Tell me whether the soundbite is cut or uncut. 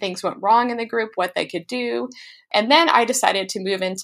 uncut